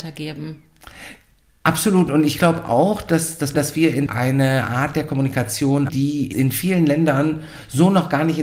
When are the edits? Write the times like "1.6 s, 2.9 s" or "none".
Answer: 3.5 s, 4.1 s, 5.9 s, 6.3 s

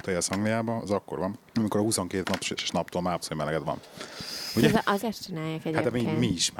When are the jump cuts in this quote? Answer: 2.2 s, 2.6 s, 3.2 s, 5.0 s

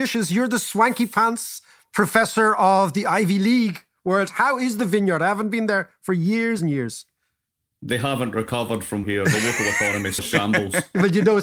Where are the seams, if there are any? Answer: 6.6 s, 9.0 s, 10.2 s

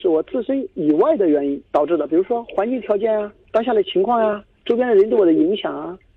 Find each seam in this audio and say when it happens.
none

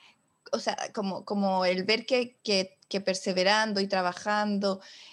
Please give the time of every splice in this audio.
2.4 s

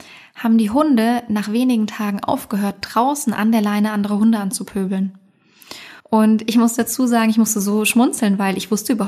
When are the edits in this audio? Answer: 6.0 s

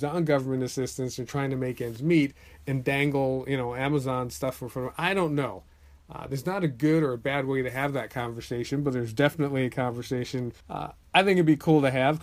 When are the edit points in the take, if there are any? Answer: 10.6 s

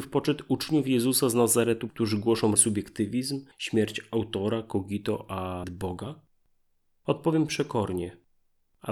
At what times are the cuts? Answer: 1.9 s, 2.6 s, 3.5 s, 5.6 s

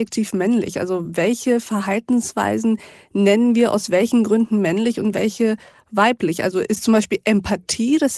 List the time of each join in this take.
none

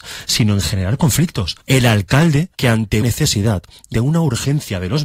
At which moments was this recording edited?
1.6 s, 2.5 s, 3.0 s, 3.9 s

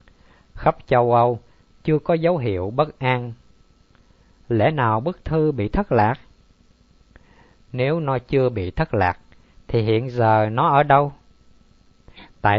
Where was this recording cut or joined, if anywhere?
none

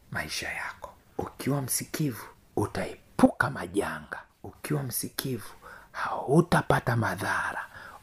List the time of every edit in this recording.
none

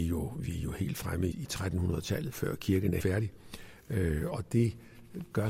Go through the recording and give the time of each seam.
1.3 s, 2.3 s, 3.0 s, 4.3 s

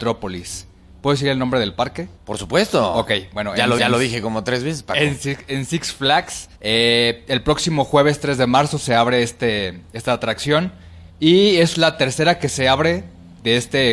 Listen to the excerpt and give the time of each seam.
2.2 s, 3.8 s, 6.5 s, 11.1 s, 11.7 s

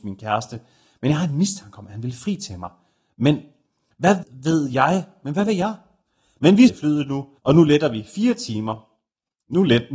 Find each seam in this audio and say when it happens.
4.2 s, 6.7 s, 7.4 s

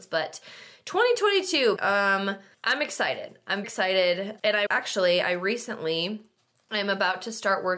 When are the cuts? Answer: 1.8 s, 2.5 s, 3.6 s, 4.7 s

